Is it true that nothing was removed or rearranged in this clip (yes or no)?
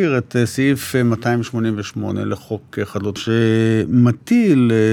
no